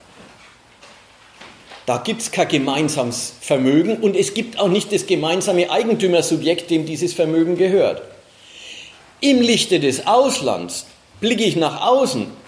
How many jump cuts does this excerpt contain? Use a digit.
0